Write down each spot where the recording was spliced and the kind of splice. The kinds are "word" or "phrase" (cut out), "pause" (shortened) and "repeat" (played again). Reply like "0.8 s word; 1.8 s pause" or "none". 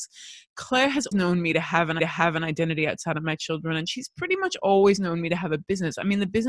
1.1 s word; 2.0 s repeat